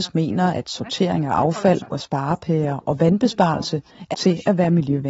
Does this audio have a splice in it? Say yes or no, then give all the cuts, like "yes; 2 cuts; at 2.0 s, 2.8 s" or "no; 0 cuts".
yes; 2 cuts; at 1.9 s, 4.1 s